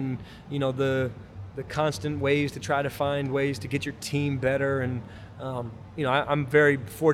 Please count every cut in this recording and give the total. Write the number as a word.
zero